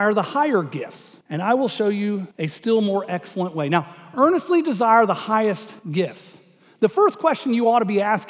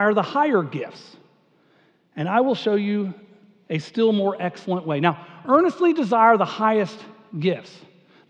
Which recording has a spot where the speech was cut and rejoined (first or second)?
first